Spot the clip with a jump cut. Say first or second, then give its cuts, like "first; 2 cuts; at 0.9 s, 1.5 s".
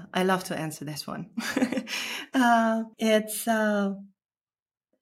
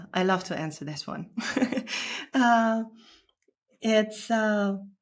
first; 1 cut; at 2.9 s